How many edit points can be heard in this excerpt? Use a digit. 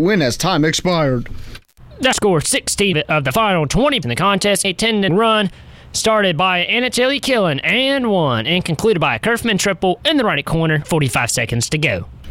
6